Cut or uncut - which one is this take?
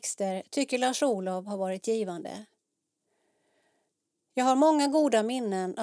uncut